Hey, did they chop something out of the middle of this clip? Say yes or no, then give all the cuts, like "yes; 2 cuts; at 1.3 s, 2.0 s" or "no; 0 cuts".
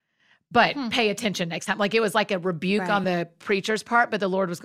no; 0 cuts